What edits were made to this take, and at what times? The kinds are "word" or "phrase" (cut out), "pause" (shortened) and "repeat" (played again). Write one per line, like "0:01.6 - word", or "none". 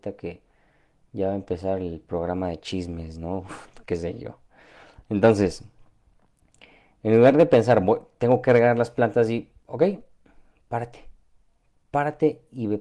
none